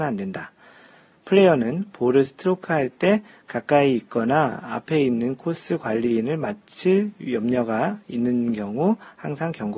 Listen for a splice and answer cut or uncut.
uncut